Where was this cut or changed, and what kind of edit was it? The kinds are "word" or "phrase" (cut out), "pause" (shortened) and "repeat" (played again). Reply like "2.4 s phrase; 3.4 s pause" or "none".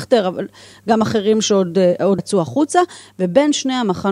2.2 s word